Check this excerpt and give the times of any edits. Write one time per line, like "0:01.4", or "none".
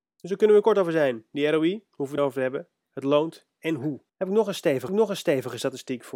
0:02.2
0:04.1
0:04.9